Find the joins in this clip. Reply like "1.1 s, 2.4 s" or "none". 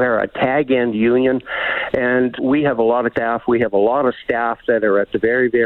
2.4 s, 3.1 s